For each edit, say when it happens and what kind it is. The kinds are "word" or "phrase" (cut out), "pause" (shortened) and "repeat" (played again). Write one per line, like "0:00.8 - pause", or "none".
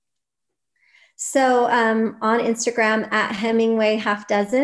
none